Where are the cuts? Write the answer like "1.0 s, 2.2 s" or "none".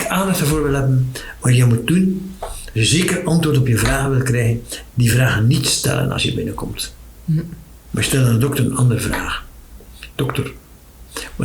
none